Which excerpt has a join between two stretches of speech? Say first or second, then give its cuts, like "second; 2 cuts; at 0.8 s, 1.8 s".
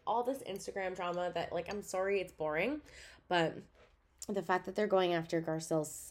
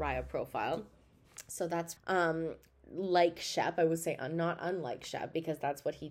second; 1 cut; at 2.0 s